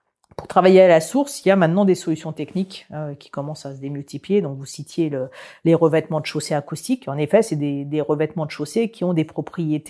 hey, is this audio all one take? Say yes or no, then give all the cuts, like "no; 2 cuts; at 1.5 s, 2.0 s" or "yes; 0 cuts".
yes; 0 cuts